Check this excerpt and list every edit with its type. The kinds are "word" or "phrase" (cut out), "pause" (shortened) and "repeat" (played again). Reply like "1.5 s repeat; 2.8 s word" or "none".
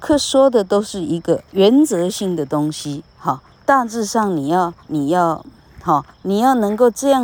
1.5 s pause; 3.5 s pause; 4.8 s pause; 6.1 s pause